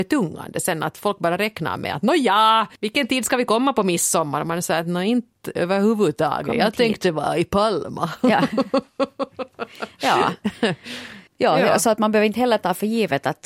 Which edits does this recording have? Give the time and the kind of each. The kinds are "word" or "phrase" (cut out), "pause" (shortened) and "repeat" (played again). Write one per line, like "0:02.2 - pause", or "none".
0:02.8 - pause
0:11.3 - pause